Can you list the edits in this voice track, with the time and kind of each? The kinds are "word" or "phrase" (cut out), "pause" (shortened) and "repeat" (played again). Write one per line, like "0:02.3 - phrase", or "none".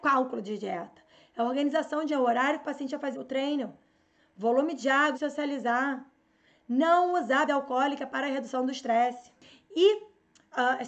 0:02.1 - word
0:03.1 - word
0:05.1 - word
0:07.5 - word